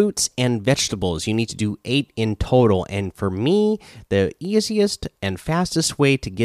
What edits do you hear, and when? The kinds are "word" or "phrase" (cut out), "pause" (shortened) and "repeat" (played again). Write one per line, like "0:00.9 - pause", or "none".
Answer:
none